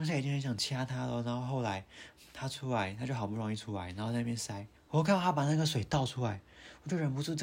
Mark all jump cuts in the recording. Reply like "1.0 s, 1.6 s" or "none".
4.8 s